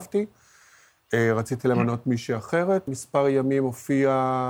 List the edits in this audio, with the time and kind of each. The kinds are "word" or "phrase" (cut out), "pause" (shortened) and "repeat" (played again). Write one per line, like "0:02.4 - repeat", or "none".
0:02.9 - word